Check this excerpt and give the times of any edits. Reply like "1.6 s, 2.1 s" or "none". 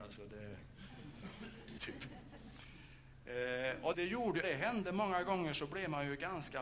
1.8 s, 3.9 s, 4.4 s